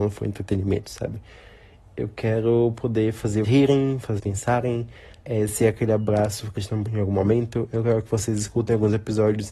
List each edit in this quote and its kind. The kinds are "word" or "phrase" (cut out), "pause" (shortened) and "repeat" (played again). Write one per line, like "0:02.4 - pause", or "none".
0:03.4 - word
0:04.2 - word
0:06.6 - word
0:06.9 - word

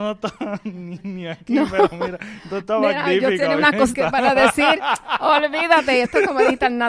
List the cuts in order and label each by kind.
0:03.9 - word

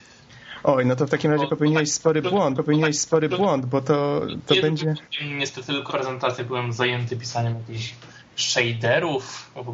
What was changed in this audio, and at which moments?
0:02.6 - repeat
0:05.9 - word

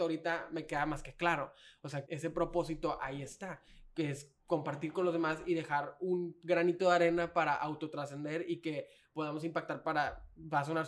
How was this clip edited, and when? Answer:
0:02.1 - word

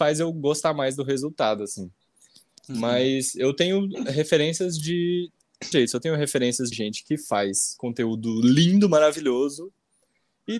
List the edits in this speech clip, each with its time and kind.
0:05.7 - phrase
0:06.7 - word

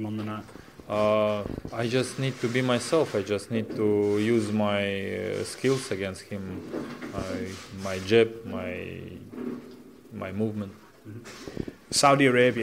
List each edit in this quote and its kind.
0:10.9 - pause

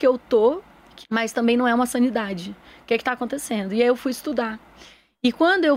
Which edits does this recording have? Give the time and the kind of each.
0:01.0 - phrase

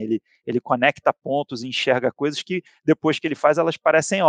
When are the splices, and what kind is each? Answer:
none

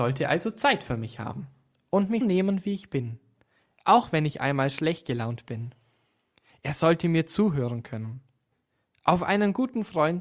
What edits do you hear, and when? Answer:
0:02.2 - word

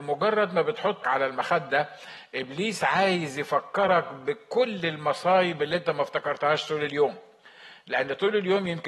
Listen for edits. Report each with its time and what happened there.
0:01.0 - word

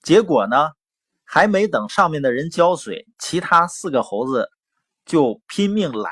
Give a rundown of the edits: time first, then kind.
none

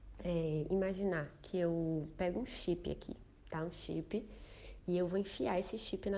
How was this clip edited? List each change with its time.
none

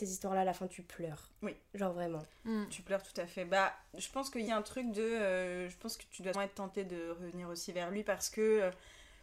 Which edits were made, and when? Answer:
0:04.5 - phrase
0:06.3 - word

